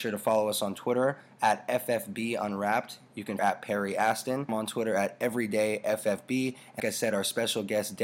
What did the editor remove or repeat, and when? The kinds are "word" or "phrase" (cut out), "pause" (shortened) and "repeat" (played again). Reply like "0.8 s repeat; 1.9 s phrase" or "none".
3.4 s phrase; 4.5 s word; 6.8 s word